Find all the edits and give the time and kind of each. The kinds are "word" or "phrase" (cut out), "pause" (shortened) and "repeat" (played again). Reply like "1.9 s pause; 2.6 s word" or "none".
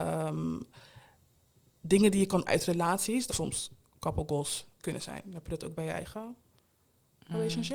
2.5 s word; 3.3 s phrase